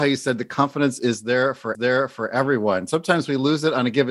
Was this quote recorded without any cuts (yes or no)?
no